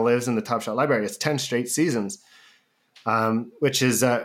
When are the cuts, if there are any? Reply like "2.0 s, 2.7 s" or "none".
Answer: none